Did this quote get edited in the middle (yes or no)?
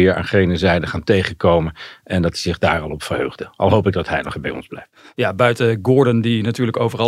yes